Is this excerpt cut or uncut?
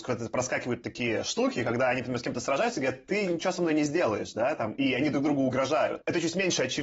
uncut